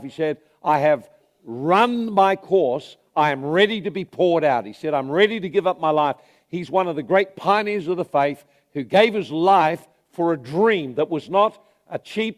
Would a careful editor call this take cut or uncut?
uncut